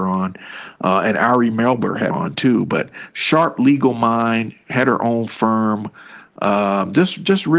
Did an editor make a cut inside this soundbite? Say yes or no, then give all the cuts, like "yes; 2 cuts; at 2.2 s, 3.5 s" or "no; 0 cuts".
yes; 1 cut; at 2.1 s